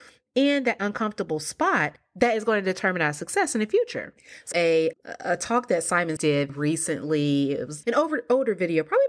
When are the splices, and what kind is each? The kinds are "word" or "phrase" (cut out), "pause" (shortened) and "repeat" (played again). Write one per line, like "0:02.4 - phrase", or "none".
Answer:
0:04.5 - phrase
0:04.9 - word
0:06.2 - word
0:06.5 - word
0:07.8 - word